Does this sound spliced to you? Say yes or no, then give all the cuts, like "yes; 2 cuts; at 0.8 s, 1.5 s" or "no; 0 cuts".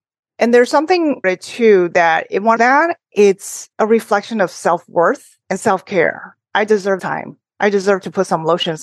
yes; 5 cuts; at 1.2 s, 2.6 s, 3.7 s, 5.4 s, 7.0 s